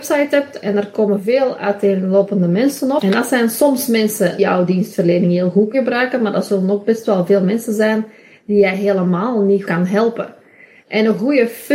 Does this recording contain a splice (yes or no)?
yes